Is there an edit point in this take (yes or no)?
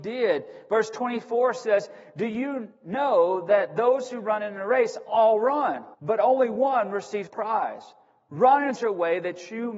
yes